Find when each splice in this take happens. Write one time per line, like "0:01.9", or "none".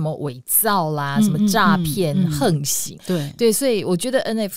0:03.0